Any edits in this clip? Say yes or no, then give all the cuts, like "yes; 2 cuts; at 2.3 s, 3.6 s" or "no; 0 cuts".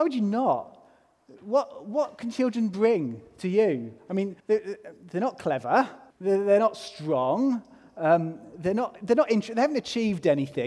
yes; 2 cuts; at 4.4 s, 6.1 s